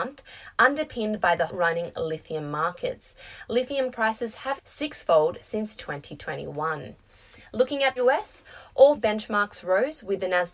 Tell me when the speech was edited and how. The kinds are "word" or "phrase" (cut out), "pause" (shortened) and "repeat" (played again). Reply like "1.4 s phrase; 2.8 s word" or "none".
1.5 s word; 3.9 s word; 4.6 s word; 5.8 s word; 8.0 s word; 9.0 s word